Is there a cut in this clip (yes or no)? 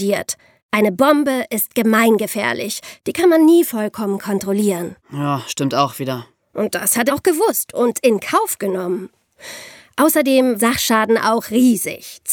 yes